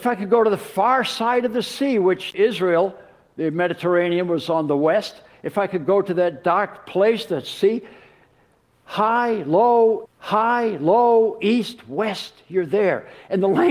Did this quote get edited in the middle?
yes; 2 cuts; at 2.3 s, 10.1 s

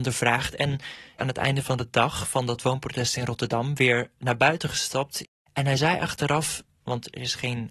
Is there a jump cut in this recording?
no; 0 cuts

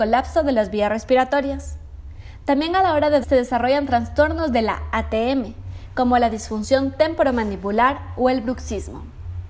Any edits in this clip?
yes; 1 cut; at 3.2 s

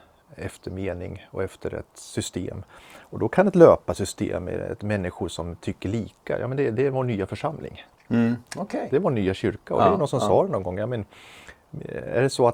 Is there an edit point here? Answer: yes; 1 cut; at 8.5 s

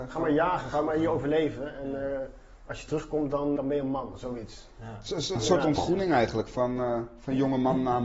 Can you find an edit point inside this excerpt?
yes; 2 cuts; at 3.6 s, 5.3 s

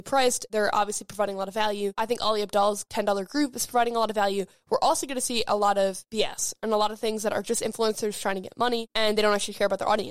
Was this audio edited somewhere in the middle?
no; 0 cuts

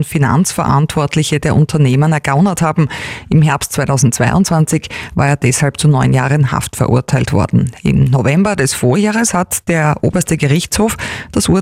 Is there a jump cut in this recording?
no; 0 cuts

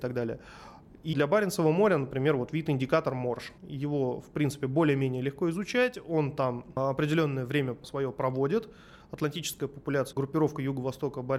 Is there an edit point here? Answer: yes; 3 cuts; at 1.1 s, 3.6 s, 10.1 s

